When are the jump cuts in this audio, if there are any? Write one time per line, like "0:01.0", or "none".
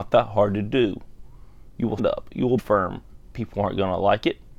0:02.0
0:02.6